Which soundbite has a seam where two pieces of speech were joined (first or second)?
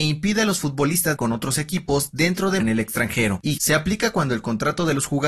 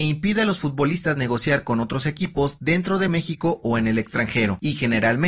first